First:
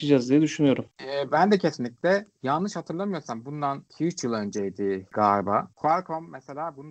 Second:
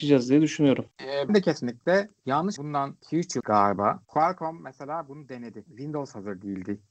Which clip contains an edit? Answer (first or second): second